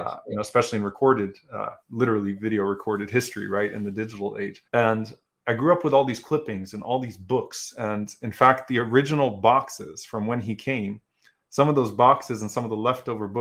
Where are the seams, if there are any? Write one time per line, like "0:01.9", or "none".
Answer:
0:01.8
0:04.7